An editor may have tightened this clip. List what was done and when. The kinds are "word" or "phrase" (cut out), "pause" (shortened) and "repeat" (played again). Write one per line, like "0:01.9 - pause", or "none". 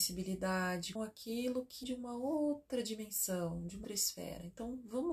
0:01.0 - word
0:01.8 - word
0:03.8 - word